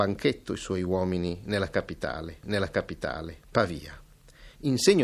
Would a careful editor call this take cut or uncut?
cut